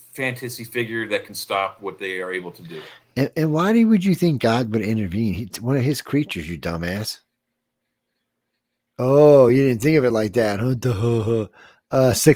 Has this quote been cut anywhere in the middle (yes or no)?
no